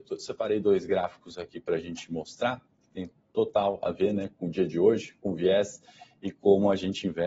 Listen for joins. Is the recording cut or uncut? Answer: uncut